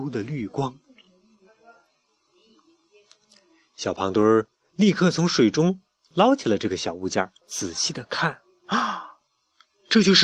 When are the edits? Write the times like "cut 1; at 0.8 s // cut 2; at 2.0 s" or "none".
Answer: cut 1; at 7.4 s